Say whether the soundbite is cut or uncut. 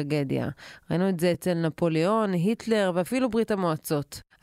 uncut